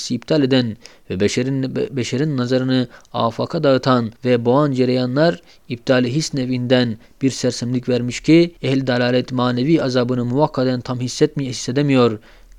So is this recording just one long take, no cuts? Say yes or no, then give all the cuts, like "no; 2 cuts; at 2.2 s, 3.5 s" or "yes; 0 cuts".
no; 2 cuts; at 4.2 s, 8.6 s